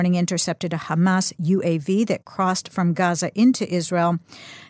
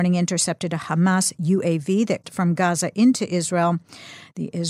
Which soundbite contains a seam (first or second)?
second